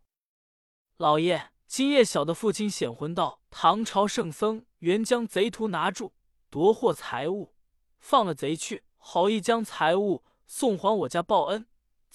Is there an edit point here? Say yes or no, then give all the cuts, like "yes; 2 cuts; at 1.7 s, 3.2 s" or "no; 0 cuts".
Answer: yes; 4 cuts; at 1.6 s, 3.4 s, 4.7 s, 8.9 s